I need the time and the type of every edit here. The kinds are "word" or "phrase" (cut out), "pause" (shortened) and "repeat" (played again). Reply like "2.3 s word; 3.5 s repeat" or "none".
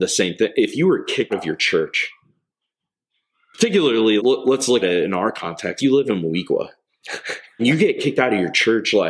1.3 s word; 4.2 s word; 4.8 s word; 5.8 s word; 7.6 s word